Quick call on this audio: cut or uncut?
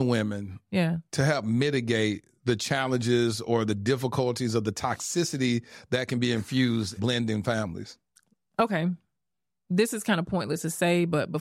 cut